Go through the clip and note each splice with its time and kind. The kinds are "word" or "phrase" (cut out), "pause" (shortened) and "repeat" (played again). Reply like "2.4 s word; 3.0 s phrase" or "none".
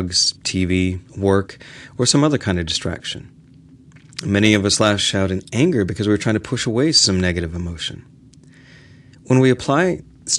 none